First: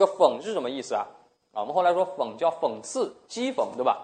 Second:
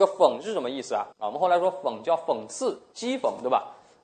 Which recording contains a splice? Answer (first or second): second